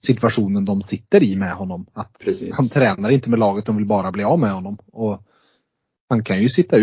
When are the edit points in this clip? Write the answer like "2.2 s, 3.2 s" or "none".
2.2 s